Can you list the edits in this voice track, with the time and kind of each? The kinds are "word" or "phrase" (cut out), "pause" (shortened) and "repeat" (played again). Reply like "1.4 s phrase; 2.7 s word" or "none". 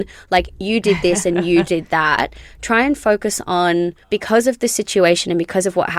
4.0 s pause